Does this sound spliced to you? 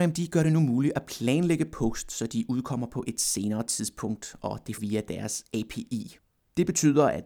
yes; 1 cut; at 4.8 s

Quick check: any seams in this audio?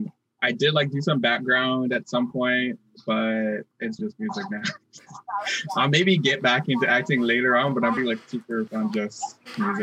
yes; 3 cuts; at 4.0 s, 8.0 s, 8.7 s

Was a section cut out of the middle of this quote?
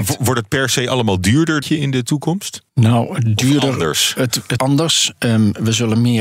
yes; 3 cuts; at 1.6 s, 2.7 s, 4.6 s

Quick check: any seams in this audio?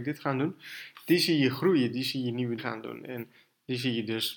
yes; 1 cut; at 2.6 s

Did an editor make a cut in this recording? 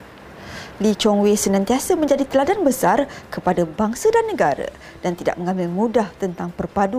no; 0 cuts

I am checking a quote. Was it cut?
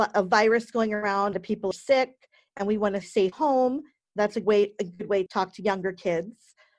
yes; 6 cuts; at 1.3 s, 1.7 s, 3.0 s, 3.3 s, 4.4 s, 5.3 s

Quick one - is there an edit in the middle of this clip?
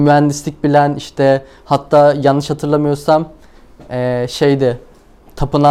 no; 0 cuts

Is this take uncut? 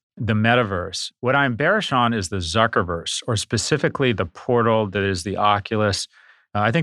yes; 0 cuts

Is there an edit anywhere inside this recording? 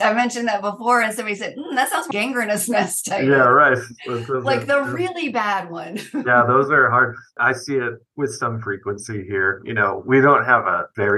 yes; 1 cut; at 2.1 s

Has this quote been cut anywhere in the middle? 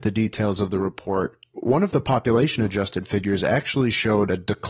no; 0 cuts

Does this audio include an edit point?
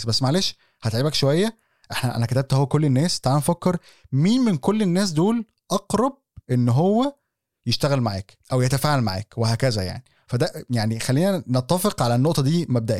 no; 0 cuts

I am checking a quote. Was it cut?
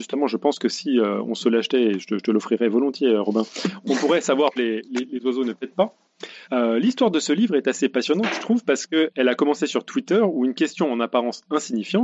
yes; 2 cuts; at 4.6 s, 6.4 s

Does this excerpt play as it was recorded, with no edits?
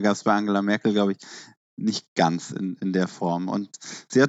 yes; 0 cuts

